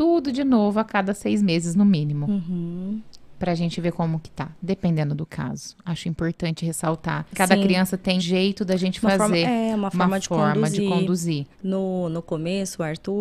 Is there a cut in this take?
yes; 3 cuts; at 7.3 s, 8.2 s, 11.5 s

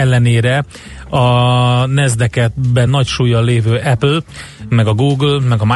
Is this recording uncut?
yes; 0 cuts

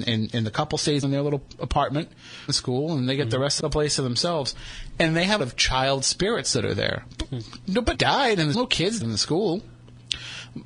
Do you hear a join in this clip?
yes; 7 cuts; at 1.0 s, 2.5 s, 3.6 s, 5.4 s, 7.9 s, 8.5 s, 9.0 s

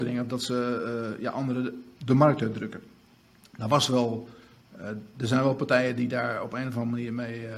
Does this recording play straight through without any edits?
yes; 0 cuts

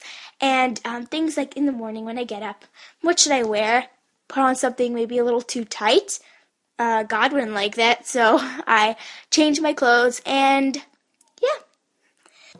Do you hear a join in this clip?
no; 0 cuts

